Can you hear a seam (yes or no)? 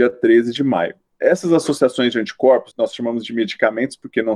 yes